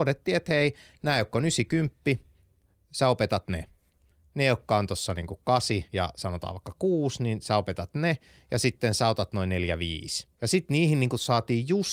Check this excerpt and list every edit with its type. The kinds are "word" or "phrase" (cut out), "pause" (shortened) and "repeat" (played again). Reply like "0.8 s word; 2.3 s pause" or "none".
5.9 s pause; 10.3 s pause